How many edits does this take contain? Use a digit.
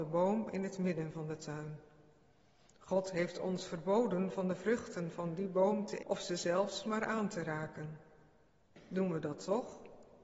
1